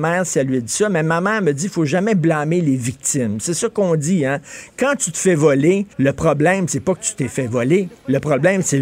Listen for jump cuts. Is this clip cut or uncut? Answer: cut